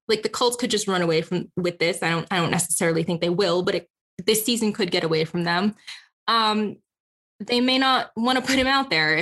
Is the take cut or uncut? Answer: uncut